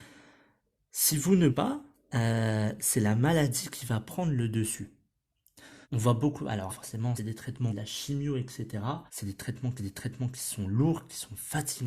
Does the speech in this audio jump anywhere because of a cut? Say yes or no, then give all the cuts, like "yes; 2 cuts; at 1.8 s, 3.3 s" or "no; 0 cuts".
yes; 8 cuts; at 1.5 s, 1.9 s, 5.8 s, 6.7 s, 7.2 s, 7.7 s, 9.1 s, 9.8 s